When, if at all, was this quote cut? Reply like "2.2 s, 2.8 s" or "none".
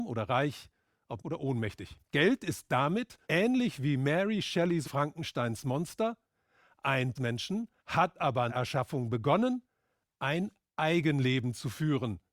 1.2 s, 2.0 s, 3.2 s, 4.8 s, 7.2 s, 7.8 s, 8.5 s

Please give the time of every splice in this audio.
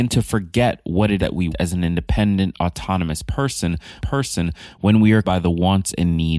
1.2 s, 1.5 s, 4.0 s, 5.2 s

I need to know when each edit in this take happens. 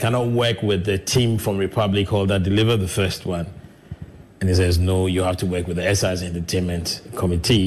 none

